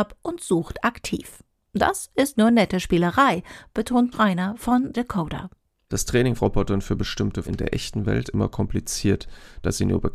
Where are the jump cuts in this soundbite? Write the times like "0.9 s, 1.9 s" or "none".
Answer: 2.3 s, 4.1 s, 4.9 s, 6.4 s, 7.4 s, 8.2 s